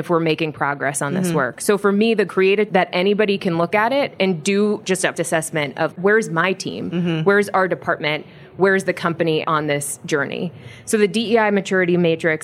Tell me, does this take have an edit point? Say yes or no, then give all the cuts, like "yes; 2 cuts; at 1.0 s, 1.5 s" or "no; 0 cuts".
yes; 5 cuts; at 2.3 s, 2.7 s, 5.1 s, 5.9 s, 9.4 s